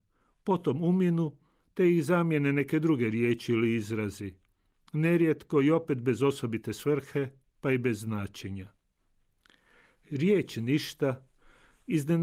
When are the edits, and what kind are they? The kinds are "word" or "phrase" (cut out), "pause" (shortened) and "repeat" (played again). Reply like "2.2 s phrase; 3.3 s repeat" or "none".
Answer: none